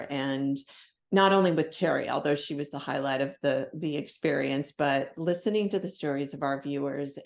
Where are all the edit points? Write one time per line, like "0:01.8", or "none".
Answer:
none